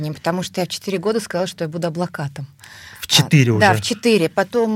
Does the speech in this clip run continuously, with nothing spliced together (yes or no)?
yes